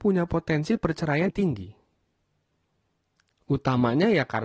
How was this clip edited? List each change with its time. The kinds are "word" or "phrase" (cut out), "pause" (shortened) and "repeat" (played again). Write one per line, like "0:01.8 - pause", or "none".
0:01.3 - word